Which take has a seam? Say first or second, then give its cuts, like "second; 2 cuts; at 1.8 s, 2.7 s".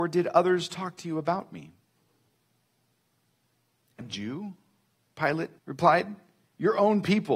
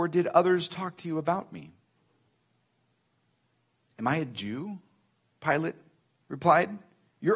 first; 2 cuts; at 4.0 s, 5.6 s